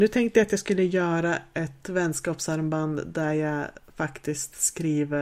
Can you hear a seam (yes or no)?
no